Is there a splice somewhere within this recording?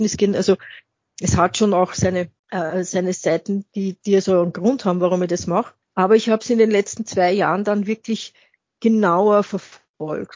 yes; 2 cuts; at 2.4 s, 5.8 s

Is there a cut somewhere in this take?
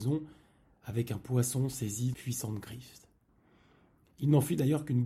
yes; 1 cut; at 2.1 s

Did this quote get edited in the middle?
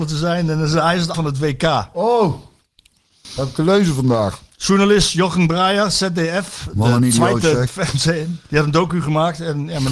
yes; 3 cuts; at 1.1 s, 7.7 s, 8.4 s

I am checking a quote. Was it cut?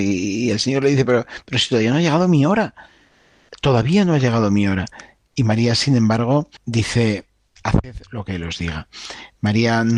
yes; 2 cuts; at 1.0 s, 6.6 s

